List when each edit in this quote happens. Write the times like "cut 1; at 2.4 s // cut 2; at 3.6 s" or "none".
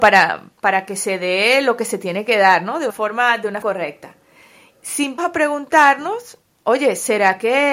cut 1; at 2.9 s // cut 2; at 3.6 s // cut 3; at 5.2 s // cut 4; at 6.5 s